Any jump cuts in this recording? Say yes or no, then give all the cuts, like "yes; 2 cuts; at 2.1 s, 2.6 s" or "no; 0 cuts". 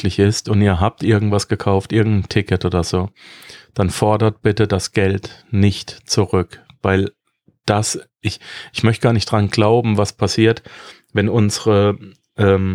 no; 0 cuts